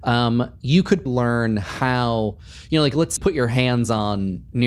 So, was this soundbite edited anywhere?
yes; 2 cuts; at 1.1 s, 3.2 s

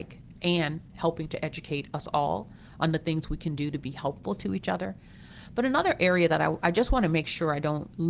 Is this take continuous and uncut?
yes; 0 cuts

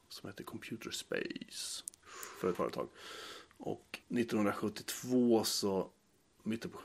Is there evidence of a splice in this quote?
yes; 2 cuts; at 2.5 s, 4.0 s

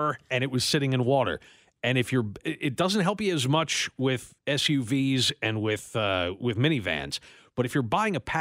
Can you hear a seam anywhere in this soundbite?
no; 0 cuts

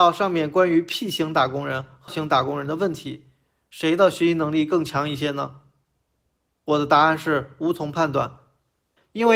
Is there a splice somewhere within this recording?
yes; 1 cut; at 2.1 s

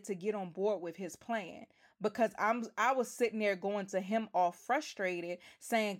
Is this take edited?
no; 0 cuts

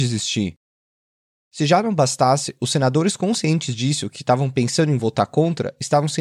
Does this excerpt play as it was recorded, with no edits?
yes; 0 cuts

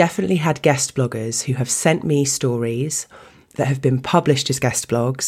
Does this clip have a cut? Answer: no; 0 cuts

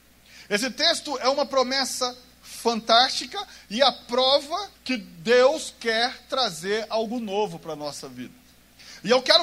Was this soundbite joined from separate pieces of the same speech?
yes; 1 cut; at 4.8 s

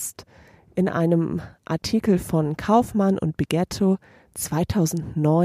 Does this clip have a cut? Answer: no; 0 cuts

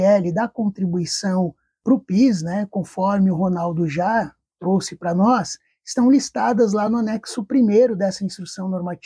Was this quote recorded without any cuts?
yes; 0 cuts

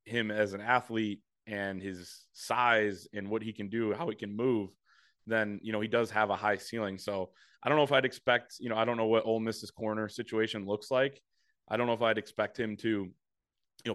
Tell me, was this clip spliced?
no; 0 cuts

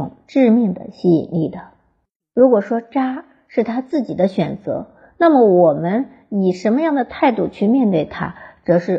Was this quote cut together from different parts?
no; 0 cuts

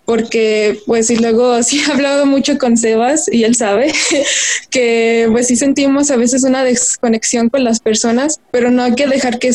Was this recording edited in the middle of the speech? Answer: no; 0 cuts

